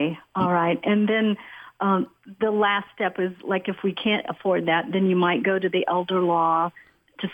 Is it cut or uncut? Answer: uncut